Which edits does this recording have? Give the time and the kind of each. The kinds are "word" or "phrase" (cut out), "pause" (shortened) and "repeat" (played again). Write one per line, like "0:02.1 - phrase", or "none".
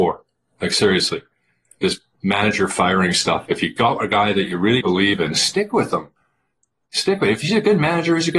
0:04.8 - word